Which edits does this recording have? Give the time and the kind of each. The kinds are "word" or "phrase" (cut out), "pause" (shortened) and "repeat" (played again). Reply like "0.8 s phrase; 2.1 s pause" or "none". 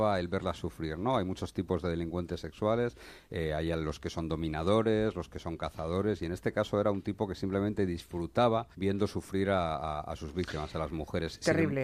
8.7 s pause